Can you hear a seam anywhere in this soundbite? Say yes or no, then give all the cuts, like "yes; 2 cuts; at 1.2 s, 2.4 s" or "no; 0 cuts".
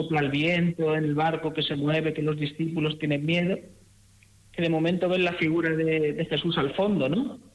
no; 0 cuts